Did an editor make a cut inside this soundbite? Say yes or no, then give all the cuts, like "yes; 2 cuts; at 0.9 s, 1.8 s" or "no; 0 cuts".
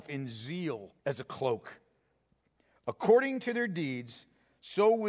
yes; 1 cut; at 1.0 s